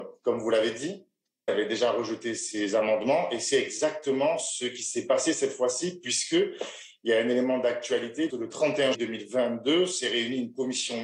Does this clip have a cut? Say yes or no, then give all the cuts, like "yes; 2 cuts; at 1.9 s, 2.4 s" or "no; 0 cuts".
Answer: yes; 3 cuts; at 1.5 s, 8.3 s, 8.9 s